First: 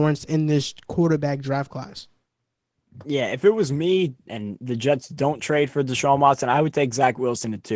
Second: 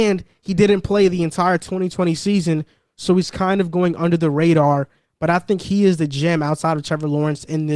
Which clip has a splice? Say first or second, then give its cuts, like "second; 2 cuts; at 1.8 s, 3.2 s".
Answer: first; 1 cut; at 4.3 s